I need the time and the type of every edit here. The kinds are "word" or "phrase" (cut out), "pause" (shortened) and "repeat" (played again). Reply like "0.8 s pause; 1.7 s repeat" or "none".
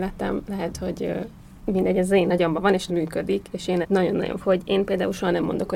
1.6 s word; 2.9 s phrase; 3.8 s word; 4.4 s word